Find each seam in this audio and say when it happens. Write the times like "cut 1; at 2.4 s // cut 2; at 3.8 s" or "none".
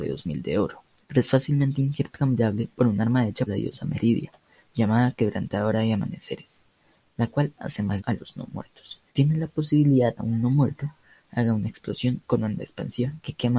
cut 1; at 1.0 s // cut 2; at 3.5 s // cut 3; at 8.0 s // cut 4; at 9.1 s // cut 5; at 10.2 s